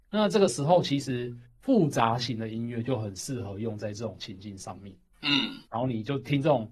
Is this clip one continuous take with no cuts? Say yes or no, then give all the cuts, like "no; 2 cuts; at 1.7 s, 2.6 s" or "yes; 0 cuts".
no; 1 cut; at 5.6 s